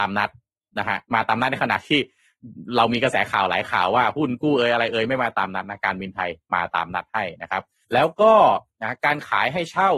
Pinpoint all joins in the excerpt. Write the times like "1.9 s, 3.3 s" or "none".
1.0 s, 7.8 s